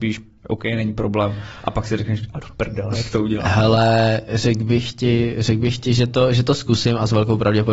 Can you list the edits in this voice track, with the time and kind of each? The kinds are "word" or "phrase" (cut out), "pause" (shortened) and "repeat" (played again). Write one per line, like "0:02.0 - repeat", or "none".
none

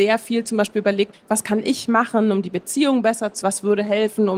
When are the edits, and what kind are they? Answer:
0:01.1 - word
0:03.4 - word

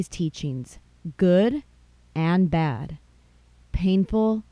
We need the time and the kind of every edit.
none

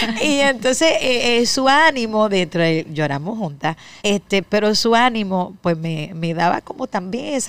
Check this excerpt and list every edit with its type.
0:04.0 - pause

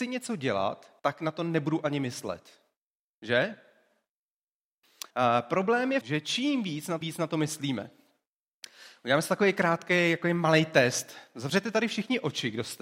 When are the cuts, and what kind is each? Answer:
0:01.0 - pause
0:05.1 - pause
0:06.0 - phrase
0:07.0 - phrase

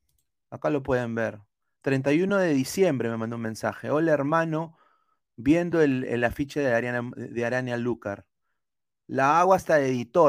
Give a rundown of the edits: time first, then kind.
none

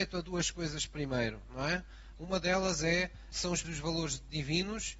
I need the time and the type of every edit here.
0:03.3 - word
0:03.6 - word

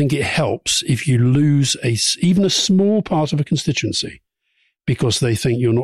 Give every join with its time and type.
none

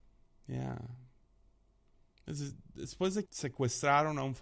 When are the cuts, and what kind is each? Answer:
0:03.3 - word

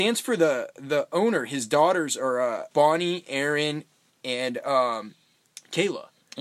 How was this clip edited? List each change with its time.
0:02.7 - pause
0:04.1 - pause

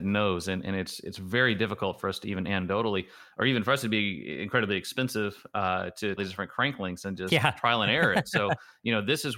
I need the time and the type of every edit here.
0:06.2 - phrase

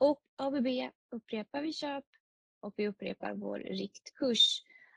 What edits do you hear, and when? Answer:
none

